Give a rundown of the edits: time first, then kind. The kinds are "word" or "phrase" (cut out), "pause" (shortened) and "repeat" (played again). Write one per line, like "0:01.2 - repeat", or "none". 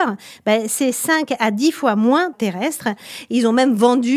0:02.3 - phrase